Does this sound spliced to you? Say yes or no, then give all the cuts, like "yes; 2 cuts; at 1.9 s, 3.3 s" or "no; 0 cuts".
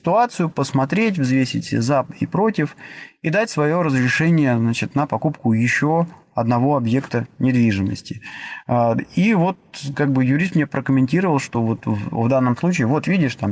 no; 0 cuts